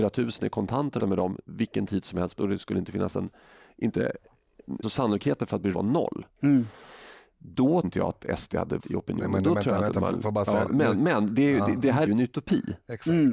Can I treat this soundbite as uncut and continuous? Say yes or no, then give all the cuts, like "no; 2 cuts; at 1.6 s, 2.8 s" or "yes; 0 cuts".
no; 7 cuts; at 1.0 s, 2.4 s, 4.8 s, 5.7 s, 7.8 s, 8.8 s, 12.1 s